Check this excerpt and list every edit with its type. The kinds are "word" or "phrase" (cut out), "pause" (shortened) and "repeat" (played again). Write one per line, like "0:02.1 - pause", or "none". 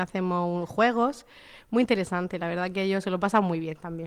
none